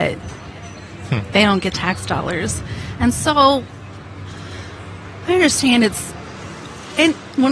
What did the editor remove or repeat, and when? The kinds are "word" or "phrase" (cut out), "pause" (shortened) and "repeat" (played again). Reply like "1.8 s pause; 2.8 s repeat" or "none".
1.7 s word